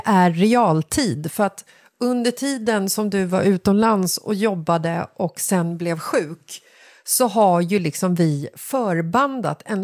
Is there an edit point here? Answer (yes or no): no